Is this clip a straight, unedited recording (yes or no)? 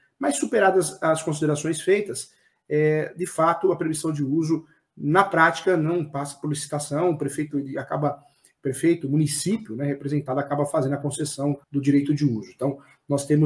no